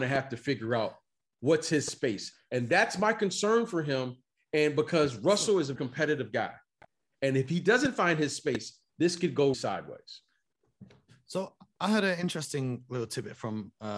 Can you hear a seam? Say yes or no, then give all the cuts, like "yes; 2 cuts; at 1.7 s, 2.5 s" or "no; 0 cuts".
yes; 2 cuts; at 5.8 s, 9.5 s